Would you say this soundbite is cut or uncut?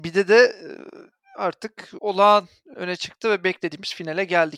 cut